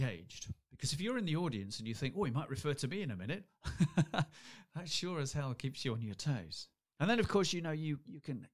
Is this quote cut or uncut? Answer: cut